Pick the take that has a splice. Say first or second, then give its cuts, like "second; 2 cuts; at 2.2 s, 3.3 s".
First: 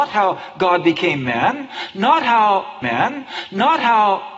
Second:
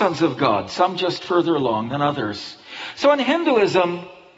first; 1 cut; at 2.8 s